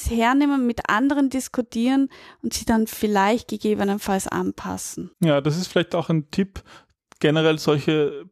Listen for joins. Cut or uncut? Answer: cut